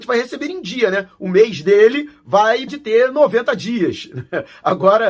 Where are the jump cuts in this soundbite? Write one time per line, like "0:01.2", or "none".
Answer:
0:02.7